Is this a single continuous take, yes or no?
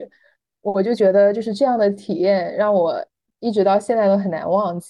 yes